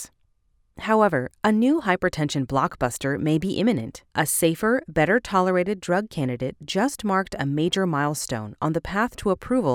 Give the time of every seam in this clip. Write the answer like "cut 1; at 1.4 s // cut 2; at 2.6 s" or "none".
cut 1; at 4.1 s